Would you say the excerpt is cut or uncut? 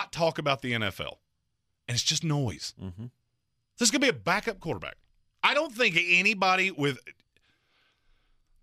uncut